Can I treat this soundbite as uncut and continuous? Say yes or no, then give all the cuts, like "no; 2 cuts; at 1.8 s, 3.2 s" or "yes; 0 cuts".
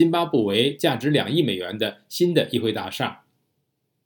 yes; 0 cuts